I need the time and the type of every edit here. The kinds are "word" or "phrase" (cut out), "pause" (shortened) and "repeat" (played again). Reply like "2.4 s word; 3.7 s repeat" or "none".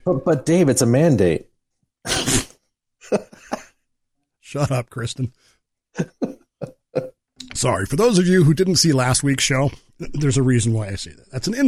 none